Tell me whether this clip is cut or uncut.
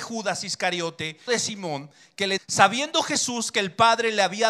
cut